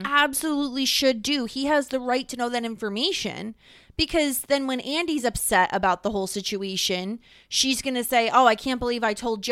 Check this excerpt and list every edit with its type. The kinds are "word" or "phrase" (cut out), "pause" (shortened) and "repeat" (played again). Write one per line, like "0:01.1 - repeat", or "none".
none